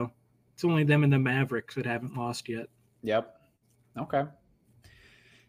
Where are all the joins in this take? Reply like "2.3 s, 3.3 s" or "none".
none